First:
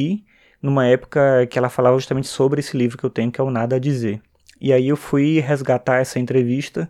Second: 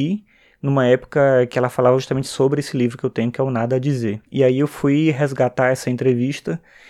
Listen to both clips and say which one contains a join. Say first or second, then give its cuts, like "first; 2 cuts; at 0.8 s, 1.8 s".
second; 1 cut; at 4.3 s